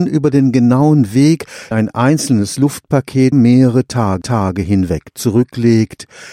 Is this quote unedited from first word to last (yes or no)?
no